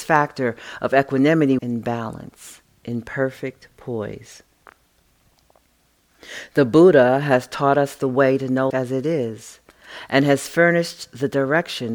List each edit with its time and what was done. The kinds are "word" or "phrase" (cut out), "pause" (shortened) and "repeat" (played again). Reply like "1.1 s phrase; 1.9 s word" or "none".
1.6 s phrase; 2.7 s pause; 8.7 s word